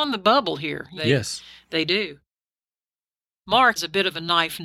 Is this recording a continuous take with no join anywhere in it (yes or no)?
no